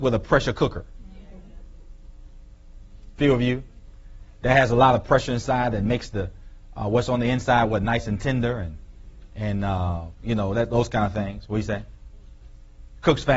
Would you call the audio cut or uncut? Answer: uncut